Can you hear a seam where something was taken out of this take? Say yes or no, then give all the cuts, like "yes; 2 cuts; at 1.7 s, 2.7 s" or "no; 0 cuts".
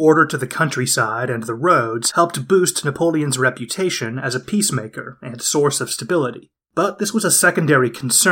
no; 0 cuts